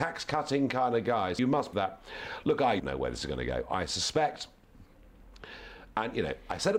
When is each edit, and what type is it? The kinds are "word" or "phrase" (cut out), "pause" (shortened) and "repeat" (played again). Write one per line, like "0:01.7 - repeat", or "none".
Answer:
0:01.4 - word
0:01.7 - word
0:02.8 - word